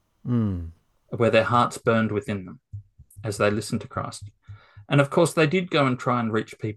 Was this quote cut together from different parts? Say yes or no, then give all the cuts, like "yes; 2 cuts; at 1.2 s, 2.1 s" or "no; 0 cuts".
no; 0 cuts